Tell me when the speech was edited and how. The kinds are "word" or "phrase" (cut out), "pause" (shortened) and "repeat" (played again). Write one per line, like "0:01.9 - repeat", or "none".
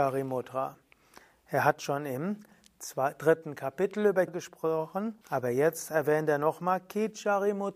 0:04.3 - phrase
0:05.2 - pause